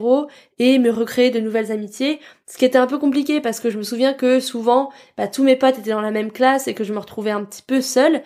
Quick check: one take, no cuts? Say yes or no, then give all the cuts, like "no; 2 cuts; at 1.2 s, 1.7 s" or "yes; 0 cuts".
yes; 0 cuts